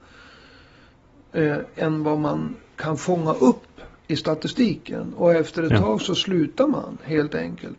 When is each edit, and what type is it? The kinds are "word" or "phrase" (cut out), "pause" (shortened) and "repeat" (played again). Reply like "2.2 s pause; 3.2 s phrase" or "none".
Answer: none